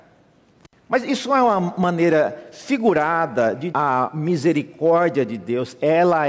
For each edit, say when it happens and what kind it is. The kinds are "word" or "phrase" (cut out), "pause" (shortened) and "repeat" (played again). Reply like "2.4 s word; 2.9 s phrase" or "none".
3.7 s phrase